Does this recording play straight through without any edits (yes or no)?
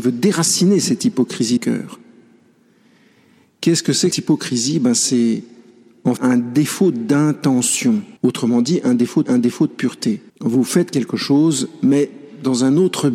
no